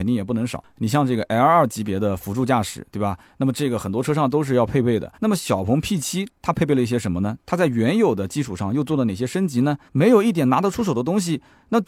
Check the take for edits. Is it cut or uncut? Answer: cut